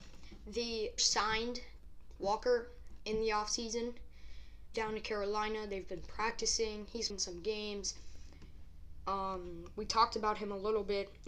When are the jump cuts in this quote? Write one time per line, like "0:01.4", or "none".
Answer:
0:01.0
0:02.2
0:04.7
0:07.1